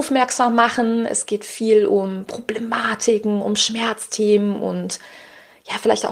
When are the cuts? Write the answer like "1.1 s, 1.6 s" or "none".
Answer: none